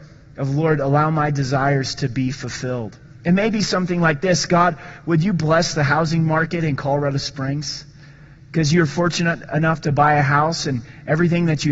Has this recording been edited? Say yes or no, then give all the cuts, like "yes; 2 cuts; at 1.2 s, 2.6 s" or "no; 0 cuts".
no; 0 cuts